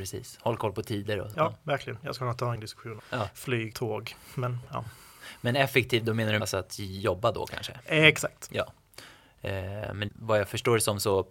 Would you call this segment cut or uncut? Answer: cut